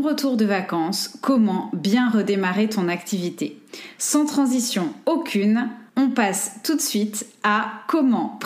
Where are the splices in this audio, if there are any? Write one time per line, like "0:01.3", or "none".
0:05.9